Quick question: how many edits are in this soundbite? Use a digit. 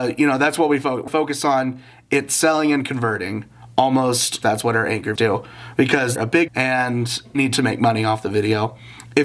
6